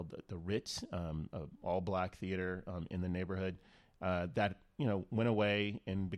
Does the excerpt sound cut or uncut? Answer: uncut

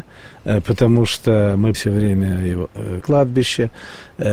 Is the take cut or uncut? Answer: cut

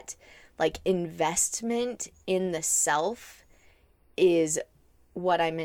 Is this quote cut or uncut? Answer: uncut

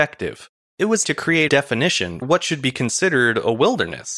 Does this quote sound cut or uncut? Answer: cut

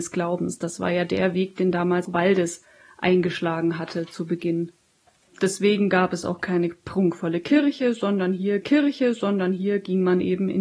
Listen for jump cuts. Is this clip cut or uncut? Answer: cut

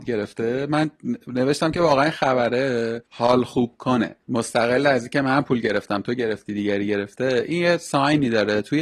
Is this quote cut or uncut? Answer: cut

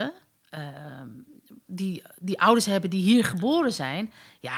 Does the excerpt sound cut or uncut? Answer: uncut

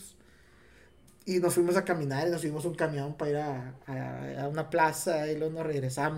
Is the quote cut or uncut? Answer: uncut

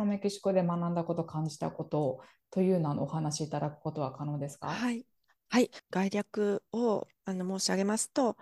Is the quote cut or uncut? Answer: uncut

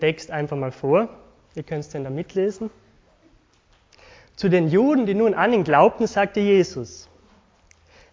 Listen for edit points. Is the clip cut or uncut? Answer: uncut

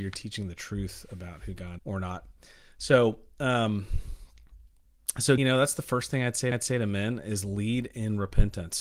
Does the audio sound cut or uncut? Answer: cut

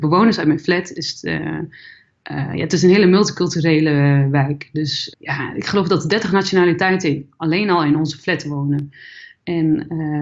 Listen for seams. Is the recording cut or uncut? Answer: cut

